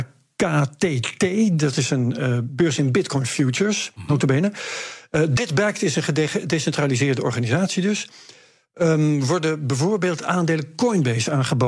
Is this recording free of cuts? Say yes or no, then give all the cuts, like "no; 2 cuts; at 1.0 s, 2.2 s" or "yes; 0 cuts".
yes; 0 cuts